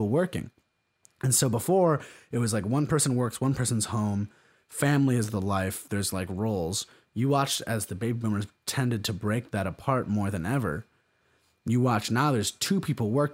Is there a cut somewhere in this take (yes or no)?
no